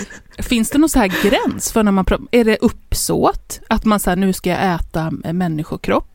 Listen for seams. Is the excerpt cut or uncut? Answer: uncut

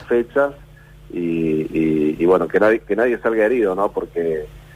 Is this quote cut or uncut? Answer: uncut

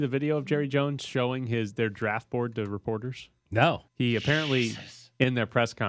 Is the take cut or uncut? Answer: cut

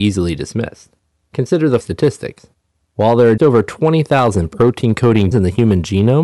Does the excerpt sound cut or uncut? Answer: cut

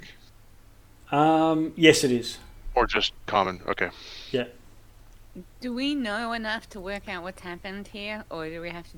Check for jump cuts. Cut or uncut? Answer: cut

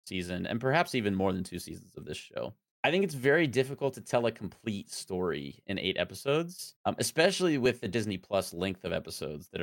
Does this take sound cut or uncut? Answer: cut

